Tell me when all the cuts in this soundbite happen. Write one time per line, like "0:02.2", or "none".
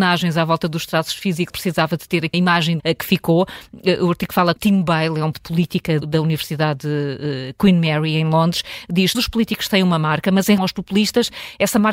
0:01.5
0:02.3
0:02.8
0:04.6
0:05.3
0:06.0
0:09.1
0:10.6

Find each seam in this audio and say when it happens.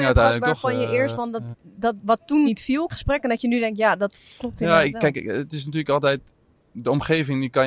0:01.1
0:01.5
0:02.5
0:02.9

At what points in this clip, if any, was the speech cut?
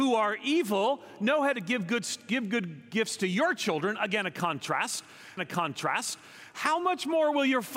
0:05.4

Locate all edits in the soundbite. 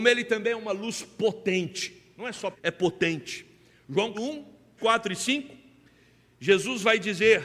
0:02.5
0:04.1
0:04.8

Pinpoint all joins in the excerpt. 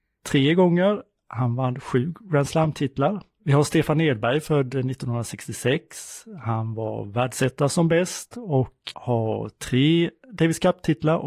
0:08.9

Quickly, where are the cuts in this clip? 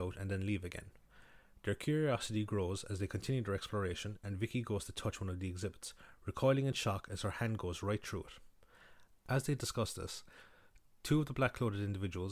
none

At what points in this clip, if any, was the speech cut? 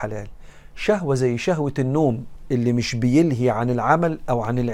none

